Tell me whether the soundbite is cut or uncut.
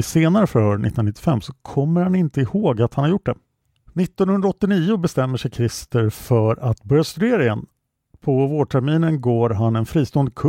uncut